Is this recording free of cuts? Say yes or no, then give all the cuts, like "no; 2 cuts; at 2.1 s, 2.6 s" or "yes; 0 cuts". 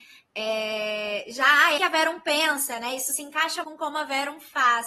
no; 2 cuts; at 1.8 s, 3.6 s